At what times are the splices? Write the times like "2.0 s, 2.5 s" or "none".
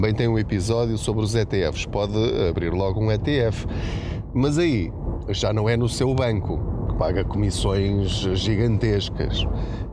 6.9 s